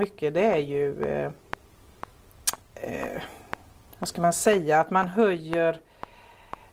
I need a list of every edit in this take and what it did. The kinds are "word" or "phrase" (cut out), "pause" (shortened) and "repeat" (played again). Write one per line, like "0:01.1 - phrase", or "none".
none